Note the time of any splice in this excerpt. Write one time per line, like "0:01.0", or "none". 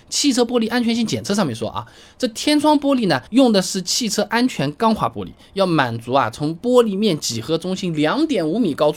0:03.3